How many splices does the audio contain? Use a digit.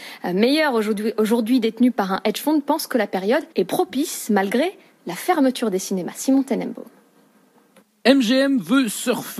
1